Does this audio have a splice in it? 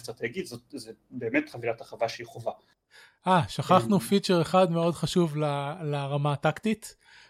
no; 0 cuts

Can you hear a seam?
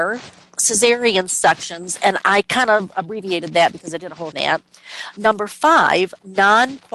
yes; 1 cut; at 4.3 s

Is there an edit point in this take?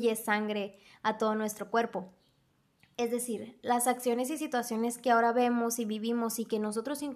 no; 0 cuts

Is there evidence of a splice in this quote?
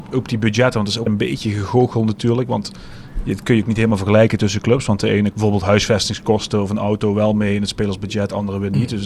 yes; 2 cuts; at 1.1 s, 5.3 s

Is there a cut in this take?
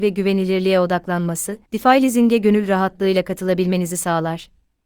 yes; 1 cut; at 1.7 s

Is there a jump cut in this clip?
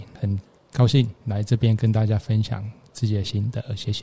yes; 1 cut; at 1.2 s

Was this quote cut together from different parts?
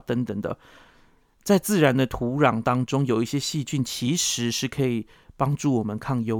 no; 0 cuts

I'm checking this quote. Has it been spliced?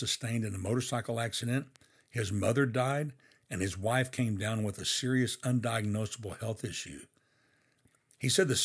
no; 0 cuts

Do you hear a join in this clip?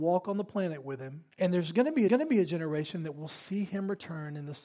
yes; 2 cuts; at 1.3 s, 2.1 s

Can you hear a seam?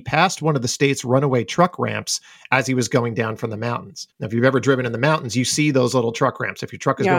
yes; 1 cut; at 4.1 s

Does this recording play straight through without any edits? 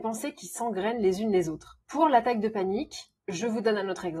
no; 2 cuts; at 1.8 s, 3.2 s

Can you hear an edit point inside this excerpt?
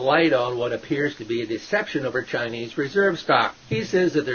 no; 0 cuts

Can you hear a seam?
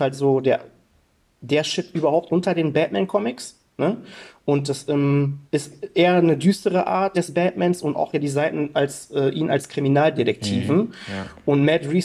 yes; 3 cuts; at 5.5 s, 7.1 s, 8.1 s

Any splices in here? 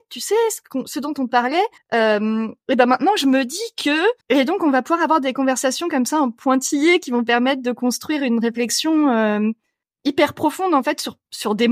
yes; 3 cuts; at 1.8 s, 4.2 s, 9.8 s

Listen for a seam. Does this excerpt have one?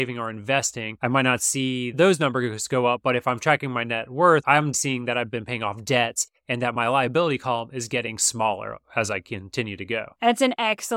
yes; 1 cut; at 4.7 s

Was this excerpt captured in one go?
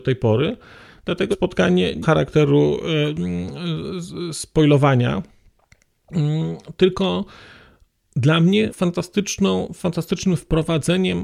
no; 3 cuts; at 1.3 s, 2.0 s, 8.7 s

